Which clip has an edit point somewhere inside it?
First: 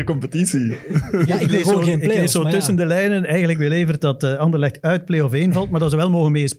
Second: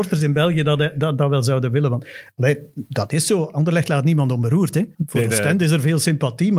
second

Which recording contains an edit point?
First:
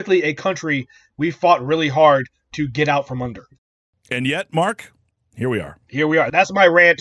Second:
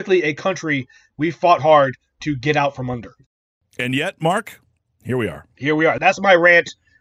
second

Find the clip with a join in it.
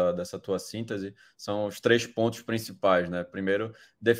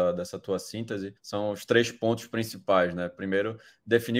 second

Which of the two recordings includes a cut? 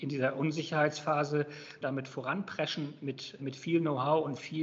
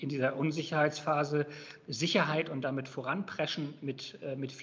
first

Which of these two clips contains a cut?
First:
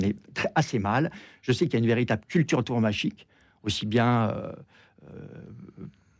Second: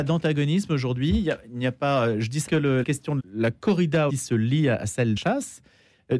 second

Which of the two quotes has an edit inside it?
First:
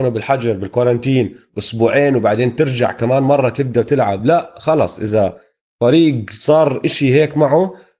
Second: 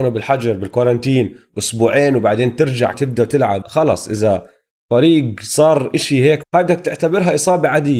second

